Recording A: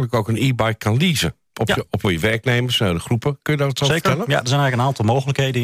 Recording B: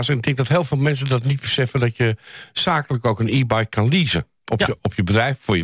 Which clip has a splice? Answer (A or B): A